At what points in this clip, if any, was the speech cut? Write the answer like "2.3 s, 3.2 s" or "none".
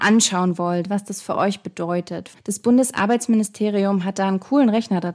2.4 s